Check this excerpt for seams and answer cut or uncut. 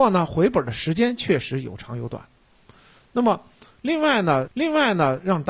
cut